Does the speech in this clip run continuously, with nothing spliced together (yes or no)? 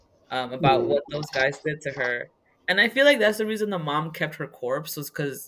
yes